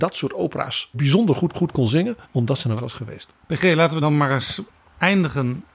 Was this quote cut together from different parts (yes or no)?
yes